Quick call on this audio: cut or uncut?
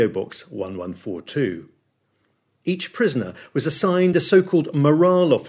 uncut